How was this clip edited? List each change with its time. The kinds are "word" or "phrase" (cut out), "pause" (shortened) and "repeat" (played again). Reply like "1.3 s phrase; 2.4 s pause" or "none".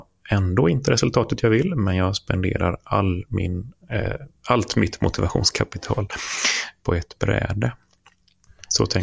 4.4 s pause